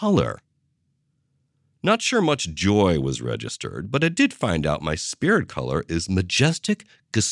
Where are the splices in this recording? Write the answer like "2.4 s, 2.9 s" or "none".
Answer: none